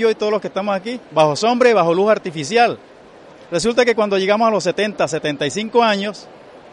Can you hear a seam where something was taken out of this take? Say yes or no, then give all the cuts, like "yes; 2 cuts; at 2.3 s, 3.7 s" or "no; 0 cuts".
no; 0 cuts